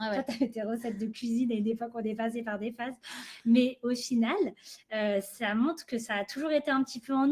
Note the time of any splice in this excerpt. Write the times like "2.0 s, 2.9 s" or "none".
none